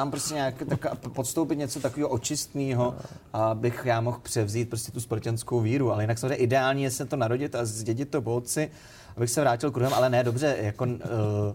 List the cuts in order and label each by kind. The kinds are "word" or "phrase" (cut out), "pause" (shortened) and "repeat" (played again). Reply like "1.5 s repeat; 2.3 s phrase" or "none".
none